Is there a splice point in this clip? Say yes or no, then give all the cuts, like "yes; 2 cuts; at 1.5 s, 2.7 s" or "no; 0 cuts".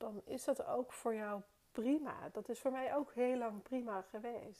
no; 0 cuts